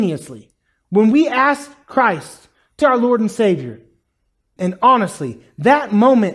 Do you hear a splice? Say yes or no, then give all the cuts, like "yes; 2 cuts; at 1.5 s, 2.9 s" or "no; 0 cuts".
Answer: yes; 2 cuts; at 2.8 s, 4.6 s